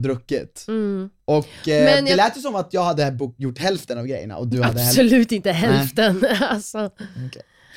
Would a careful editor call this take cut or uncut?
uncut